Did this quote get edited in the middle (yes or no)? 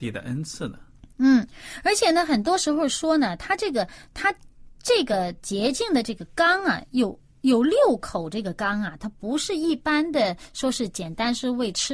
no